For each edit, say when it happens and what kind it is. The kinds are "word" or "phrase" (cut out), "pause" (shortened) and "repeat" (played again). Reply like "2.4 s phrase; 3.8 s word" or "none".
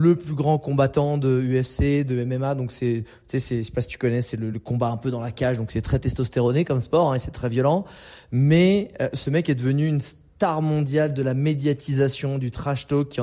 none